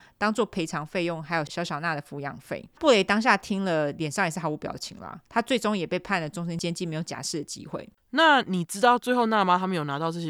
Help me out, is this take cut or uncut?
cut